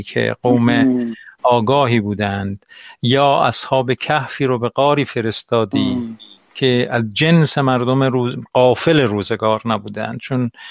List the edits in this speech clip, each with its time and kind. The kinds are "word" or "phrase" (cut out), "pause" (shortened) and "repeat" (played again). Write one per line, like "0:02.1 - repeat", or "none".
none